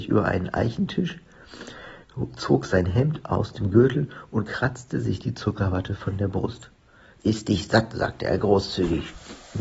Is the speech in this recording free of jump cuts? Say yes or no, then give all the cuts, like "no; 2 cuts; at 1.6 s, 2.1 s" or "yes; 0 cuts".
yes; 0 cuts